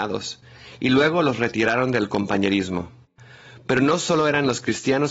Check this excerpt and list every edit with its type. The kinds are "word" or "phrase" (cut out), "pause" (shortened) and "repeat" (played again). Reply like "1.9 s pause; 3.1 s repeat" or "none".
none